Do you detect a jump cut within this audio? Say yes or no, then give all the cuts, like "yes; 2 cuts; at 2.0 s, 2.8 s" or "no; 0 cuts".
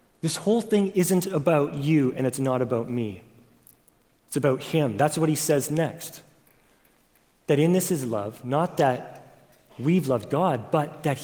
no; 0 cuts